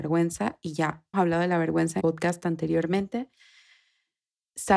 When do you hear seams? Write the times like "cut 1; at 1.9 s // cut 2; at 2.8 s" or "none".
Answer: cut 1; at 1.1 s // cut 2; at 2.0 s